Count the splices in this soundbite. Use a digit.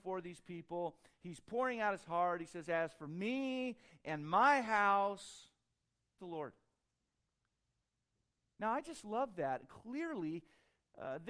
1